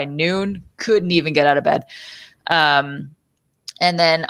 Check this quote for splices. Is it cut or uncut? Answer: uncut